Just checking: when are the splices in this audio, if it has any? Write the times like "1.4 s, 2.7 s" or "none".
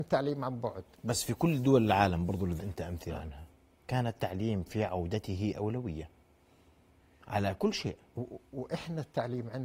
0.9 s, 2.6 s